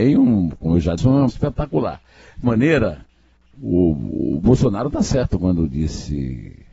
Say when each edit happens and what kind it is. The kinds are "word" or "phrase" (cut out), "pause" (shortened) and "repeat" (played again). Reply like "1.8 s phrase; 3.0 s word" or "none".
1.0 s word; 1.3 s word; 2.4 s word; 3.5 s word